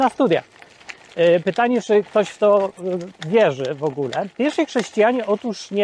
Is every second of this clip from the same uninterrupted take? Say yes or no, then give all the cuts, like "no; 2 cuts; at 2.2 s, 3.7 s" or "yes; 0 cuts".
yes; 0 cuts